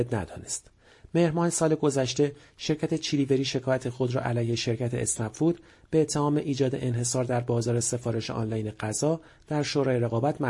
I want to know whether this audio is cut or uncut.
uncut